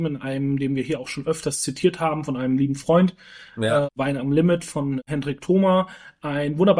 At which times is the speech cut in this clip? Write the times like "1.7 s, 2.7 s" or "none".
none